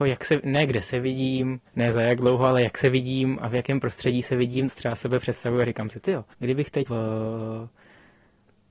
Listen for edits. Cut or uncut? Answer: cut